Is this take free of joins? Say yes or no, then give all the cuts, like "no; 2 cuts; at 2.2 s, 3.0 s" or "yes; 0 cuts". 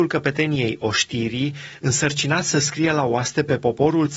yes; 0 cuts